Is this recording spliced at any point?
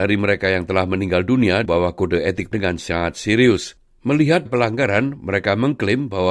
yes; 3 cuts; at 1.7 s, 2.5 s, 4.5 s

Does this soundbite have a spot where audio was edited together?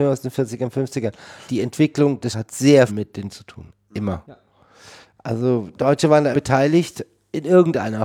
yes; 6 cuts; at 1.5 s, 2.3 s, 2.9 s, 3.3 s, 5.7 s, 6.3 s

